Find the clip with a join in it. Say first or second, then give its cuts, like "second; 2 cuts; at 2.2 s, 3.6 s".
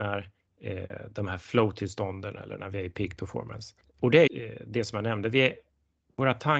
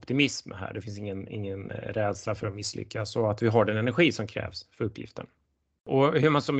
first; 2 cuts; at 3.8 s, 4.3 s